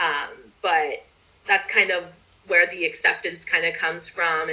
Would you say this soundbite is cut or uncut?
uncut